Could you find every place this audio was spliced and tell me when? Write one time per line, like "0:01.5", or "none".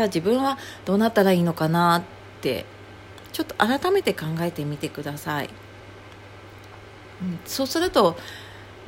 none